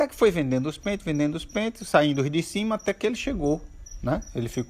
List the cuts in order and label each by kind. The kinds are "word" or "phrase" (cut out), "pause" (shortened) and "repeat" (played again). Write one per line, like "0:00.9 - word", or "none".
none